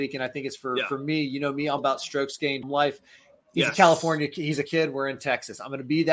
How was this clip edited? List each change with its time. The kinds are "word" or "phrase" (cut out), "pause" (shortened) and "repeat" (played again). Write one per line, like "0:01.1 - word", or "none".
0:01.8 - word
0:02.6 - word
0:04.6 - word